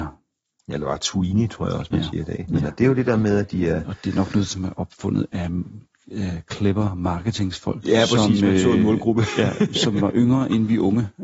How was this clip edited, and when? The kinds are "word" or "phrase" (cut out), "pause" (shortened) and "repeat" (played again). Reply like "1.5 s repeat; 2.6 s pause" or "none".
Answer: none